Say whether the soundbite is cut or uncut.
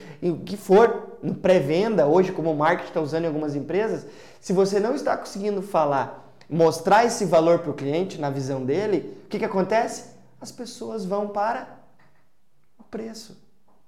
uncut